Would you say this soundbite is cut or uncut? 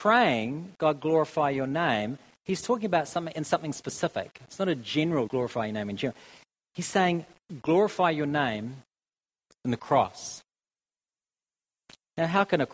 cut